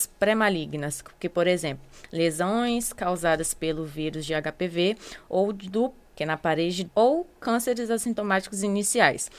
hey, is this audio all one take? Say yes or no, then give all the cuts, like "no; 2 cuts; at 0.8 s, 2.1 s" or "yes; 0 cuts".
no; 2 cuts; at 6.1 s, 6.9 s